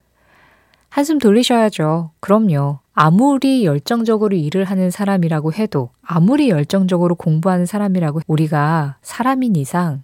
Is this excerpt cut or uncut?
cut